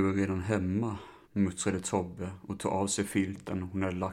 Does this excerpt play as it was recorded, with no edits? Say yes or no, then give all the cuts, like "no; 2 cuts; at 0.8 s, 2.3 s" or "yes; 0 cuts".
no; 1 cut; at 1.2 s